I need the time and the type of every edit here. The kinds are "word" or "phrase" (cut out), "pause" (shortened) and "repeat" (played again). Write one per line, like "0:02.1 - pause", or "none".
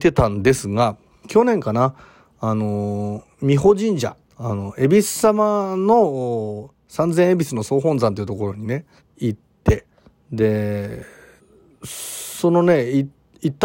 0:01.2 - word
0:03.3 - pause
0:04.3 - pause
0:09.0 - pause
0:11.4 - pause